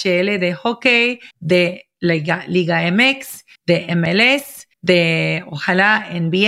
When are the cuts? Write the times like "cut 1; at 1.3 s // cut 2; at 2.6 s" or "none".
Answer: cut 1; at 1.3 s // cut 2; at 3.5 s // cut 3; at 4.7 s

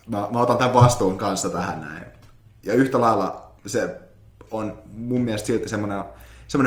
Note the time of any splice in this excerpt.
cut 1; at 3.6 s

